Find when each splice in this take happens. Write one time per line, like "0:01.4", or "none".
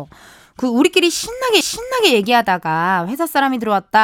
0:01.6